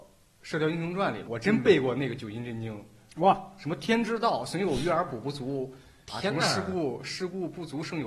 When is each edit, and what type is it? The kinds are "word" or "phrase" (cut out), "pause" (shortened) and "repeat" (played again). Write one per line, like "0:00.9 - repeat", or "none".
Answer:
0:01.3 - word